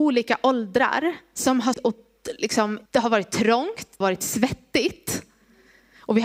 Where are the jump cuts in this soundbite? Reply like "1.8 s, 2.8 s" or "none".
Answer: 1.7 s, 2.9 s, 4.0 s